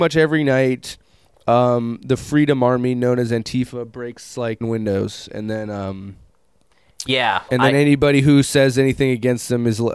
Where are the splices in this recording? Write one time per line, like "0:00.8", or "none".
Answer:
0:04.6
0:07.5